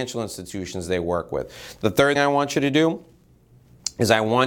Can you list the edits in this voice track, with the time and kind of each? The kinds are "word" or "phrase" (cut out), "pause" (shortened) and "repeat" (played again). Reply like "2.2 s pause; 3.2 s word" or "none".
2.2 s word